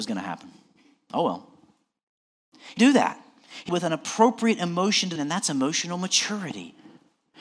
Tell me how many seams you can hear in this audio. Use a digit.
3